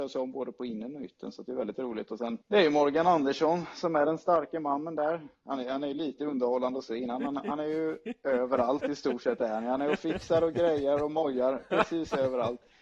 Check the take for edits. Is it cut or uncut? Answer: cut